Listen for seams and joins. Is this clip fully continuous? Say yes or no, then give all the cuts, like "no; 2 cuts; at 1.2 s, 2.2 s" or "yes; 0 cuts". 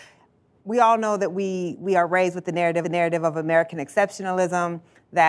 no; 1 cut; at 2.8 s